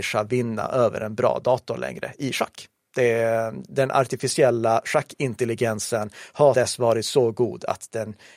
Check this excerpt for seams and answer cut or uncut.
cut